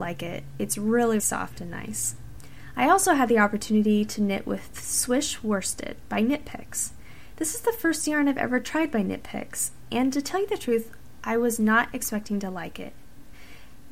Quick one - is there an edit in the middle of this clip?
yes; 1 cut; at 1.2 s

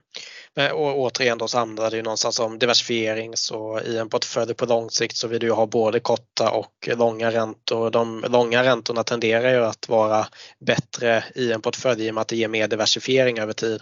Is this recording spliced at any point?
no; 0 cuts

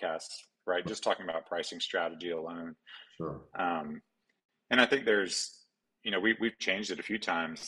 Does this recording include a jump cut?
no; 0 cuts

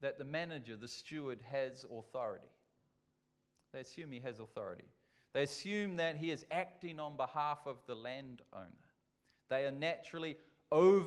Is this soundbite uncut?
yes; 0 cuts

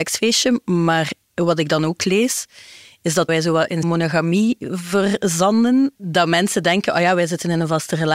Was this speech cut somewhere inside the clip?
yes; 2 cuts; at 3.3 s, 3.8 s

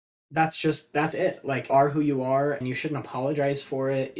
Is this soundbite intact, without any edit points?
no; 3 cuts; at 1.1 s, 1.7 s, 2.6 s

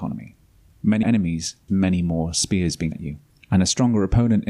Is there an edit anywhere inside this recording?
yes; 4 cuts; at 1.0 s, 1.7 s, 2.9 s, 3.3 s

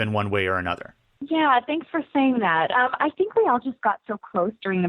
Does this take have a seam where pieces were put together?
no; 0 cuts

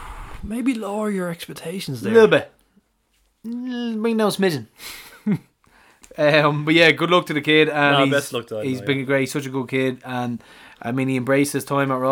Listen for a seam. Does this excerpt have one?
no; 0 cuts

